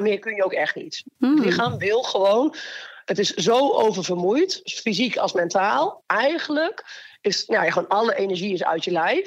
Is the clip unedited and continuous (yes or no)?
no